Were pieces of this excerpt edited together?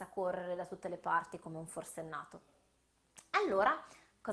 no; 0 cuts

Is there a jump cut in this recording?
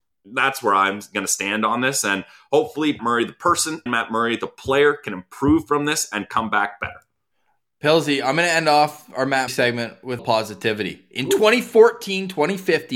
yes; 4 cuts; at 3.0 s, 3.9 s, 9.5 s, 10.2 s

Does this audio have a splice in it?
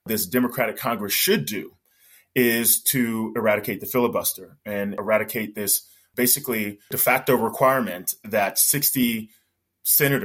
no; 0 cuts

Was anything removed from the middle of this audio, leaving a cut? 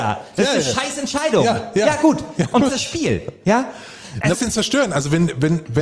yes; 2 cuts; at 2.7 s, 4.3 s

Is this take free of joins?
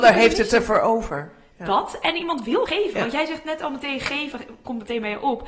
no; 1 cut; at 2.7 s

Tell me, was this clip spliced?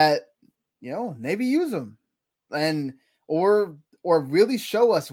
no; 0 cuts

